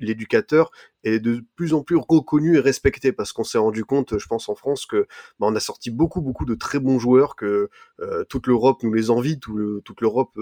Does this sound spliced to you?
no; 0 cuts

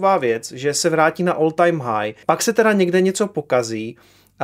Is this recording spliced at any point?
yes; 1 cut; at 2.2 s

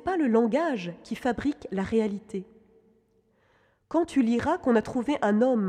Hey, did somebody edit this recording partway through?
no; 0 cuts

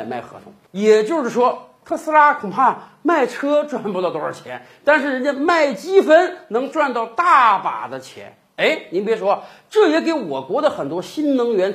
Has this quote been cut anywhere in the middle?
no; 0 cuts

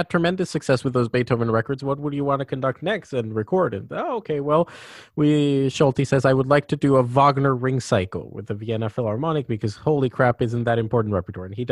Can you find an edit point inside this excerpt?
no; 0 cuts

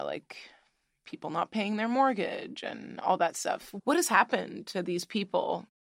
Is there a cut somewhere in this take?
no; 0 cuts

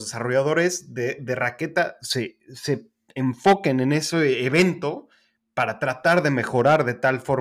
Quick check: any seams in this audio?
no; 0 cuts

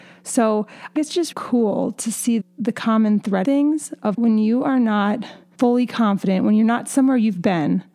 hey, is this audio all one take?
no; 6 cuts; at 1.0 s, 1.3 s, 2.4 s, 3.4 s, 4.1 s, 5.5 s

